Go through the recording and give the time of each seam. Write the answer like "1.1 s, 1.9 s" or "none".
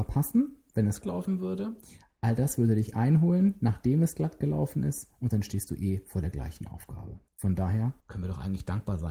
1.0 s, 7.3 s, 8.0 s